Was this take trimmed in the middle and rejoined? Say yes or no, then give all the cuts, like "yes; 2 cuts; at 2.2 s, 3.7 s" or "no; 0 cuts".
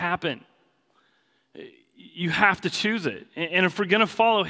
no; 0 cuts